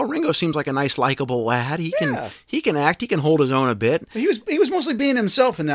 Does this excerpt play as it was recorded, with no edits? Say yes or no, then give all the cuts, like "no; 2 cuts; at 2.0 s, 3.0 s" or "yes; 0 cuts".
yes; 0 cuts